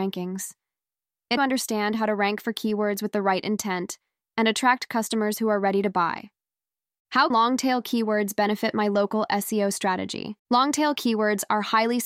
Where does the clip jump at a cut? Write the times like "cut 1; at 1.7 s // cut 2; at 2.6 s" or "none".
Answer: cut 1; at 1.4 s // cut 2; at 7.3 s // cut 3; at 10.4 s

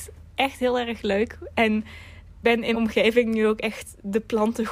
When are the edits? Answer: cut 1; at 2.4 s // cut 2; at 2.7 s

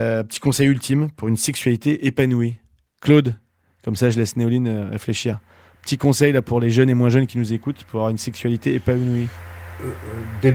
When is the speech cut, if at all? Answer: none

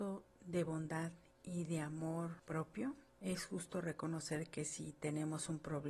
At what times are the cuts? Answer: none

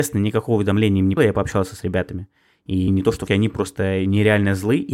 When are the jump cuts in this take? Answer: cut 1; at 1.2 s // cut 2; at 2.9 s // cut 3; at 3.3 s

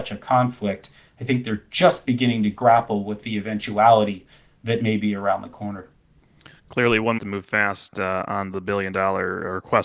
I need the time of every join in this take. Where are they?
cut 1; at 7.2 s

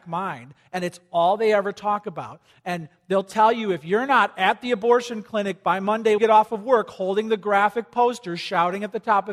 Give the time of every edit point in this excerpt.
cut 1; at 6.2 s

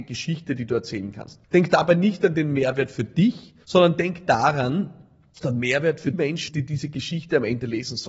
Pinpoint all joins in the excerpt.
cut 1; at 1.4 s // cut 2; at 3.6 s // cut 3; at 5.4 s // cut 4; at 6.1 s // cut 5; at 6.5 s

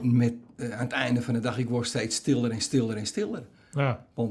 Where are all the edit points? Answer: none

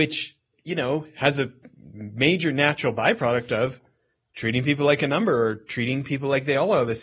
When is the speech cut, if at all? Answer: none

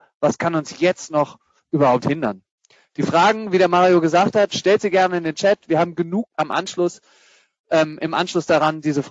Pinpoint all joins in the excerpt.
cut 1; at 6.3 s

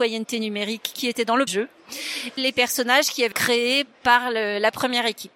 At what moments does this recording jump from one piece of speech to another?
cut 1; at 1.5 s // cut 2; at 2.4 s // cut 3; at 3.3 s // cut 4; at 3.9 s

